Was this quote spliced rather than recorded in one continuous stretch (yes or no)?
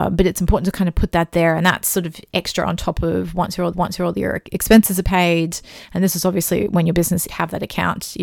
yes